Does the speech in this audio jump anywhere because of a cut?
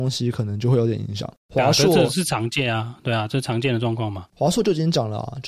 yes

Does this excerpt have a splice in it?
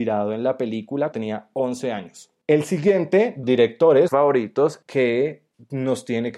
yes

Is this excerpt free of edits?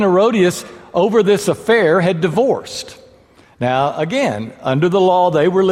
yes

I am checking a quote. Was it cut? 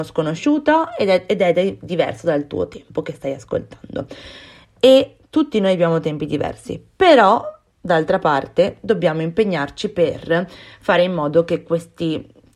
no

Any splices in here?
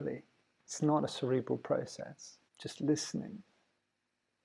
yes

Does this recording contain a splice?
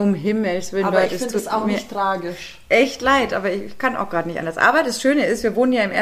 no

